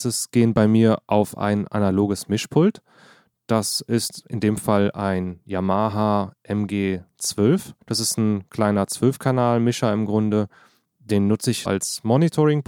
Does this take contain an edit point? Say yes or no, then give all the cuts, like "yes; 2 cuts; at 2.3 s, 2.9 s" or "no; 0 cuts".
yes; 2 cuts; at 7.8 s, 11.7 s